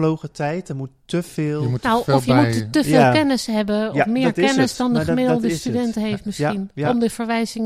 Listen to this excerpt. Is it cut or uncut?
uncut